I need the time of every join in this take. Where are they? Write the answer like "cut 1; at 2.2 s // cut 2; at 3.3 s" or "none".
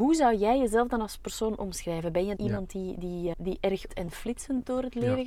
cut 1; at 2.4 s // cut 2; at 3.3 s // cut 3; at 3.9 s